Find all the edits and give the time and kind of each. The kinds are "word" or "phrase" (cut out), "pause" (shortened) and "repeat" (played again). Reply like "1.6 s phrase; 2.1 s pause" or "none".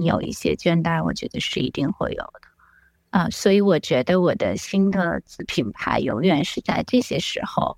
none